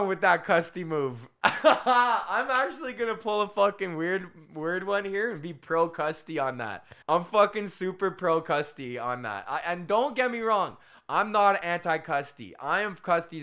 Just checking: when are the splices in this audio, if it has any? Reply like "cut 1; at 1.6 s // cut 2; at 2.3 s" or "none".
cut 1; at 7.0 s